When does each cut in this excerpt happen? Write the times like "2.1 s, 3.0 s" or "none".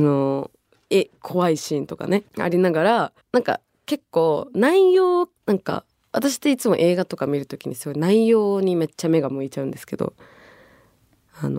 2.3 s, 3.2 s, 5.4 s